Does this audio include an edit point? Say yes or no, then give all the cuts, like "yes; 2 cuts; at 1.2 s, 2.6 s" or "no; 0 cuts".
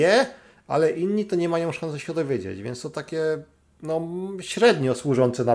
no; 0 cuts